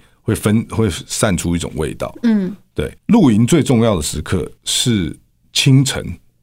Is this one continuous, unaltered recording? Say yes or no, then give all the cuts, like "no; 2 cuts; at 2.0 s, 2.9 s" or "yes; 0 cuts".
no; 2 cuts; at 3.0 s, 4.6 s